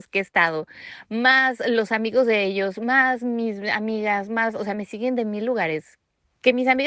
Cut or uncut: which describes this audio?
uncut